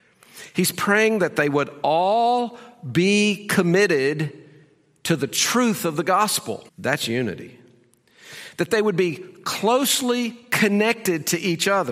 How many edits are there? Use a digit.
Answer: 1